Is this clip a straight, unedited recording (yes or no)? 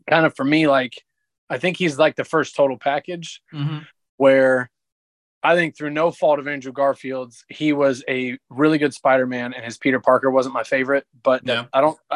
yes